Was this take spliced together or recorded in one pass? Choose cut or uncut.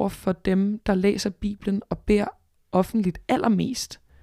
uncut